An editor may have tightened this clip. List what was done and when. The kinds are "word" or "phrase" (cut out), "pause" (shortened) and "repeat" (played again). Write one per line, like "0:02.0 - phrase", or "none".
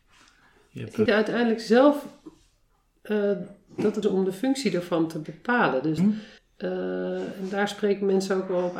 0:01.1 - phrase
0:04.0 - phrase
0:06.0 - word
0:06.4 - pause